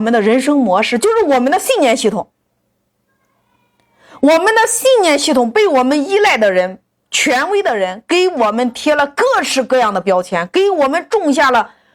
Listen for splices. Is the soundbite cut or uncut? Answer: uncut